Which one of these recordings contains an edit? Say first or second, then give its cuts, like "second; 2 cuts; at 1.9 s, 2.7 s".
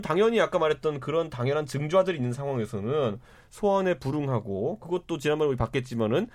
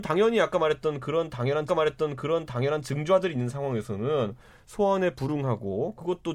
second; 1 cut; at 1.7 s